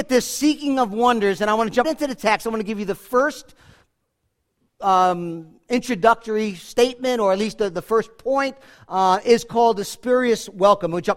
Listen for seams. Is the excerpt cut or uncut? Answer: cut